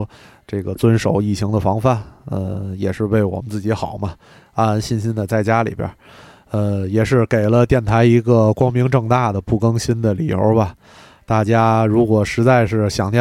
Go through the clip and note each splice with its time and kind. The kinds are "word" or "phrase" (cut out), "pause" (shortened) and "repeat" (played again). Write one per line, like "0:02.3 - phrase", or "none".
none